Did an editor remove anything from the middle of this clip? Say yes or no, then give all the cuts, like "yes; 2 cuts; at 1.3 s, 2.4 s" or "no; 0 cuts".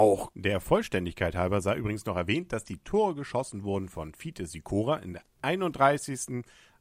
no; 0 cuts